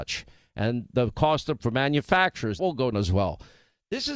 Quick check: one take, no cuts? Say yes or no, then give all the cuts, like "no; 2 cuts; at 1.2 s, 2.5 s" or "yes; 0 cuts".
no; 3 cuts; at 1.6 s, 2.6 s, 2.9 s